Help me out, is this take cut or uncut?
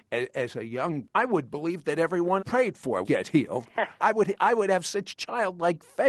cut